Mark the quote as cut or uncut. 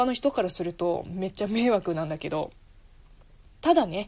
uncut